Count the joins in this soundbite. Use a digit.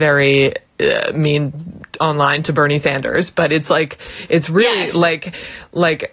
0